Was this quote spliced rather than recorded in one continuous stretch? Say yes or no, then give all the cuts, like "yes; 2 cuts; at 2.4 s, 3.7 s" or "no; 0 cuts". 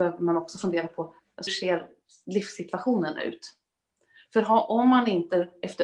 yes; 1 cut; at 1.5 s